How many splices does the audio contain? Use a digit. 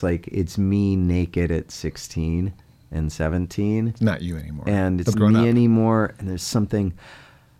1